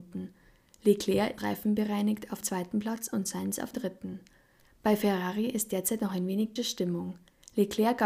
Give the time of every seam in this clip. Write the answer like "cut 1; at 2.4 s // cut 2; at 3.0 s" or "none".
cut 1; at 1.4 s // cut 2; at 2.4 s // cut 3; at 3.7 s // cut 4; at 6.6 s